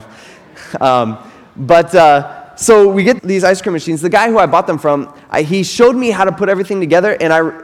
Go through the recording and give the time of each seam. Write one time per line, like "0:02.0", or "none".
0:03.2